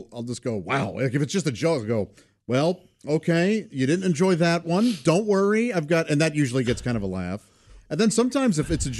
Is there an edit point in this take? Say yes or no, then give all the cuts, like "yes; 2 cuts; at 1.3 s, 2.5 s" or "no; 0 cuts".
no; 0 cuts